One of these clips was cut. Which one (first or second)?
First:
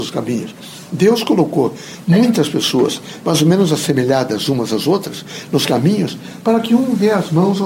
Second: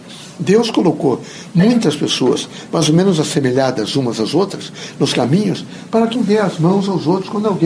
second